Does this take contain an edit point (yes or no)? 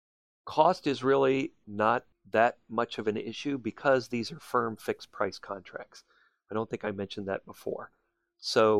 no